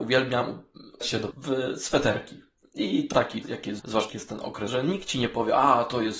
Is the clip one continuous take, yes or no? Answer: no